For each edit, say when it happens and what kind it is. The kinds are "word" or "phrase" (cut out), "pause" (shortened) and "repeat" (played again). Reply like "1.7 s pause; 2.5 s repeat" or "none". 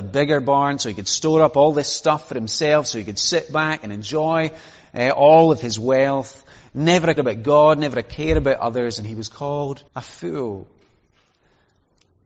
7.2 s word; 9.9 s pause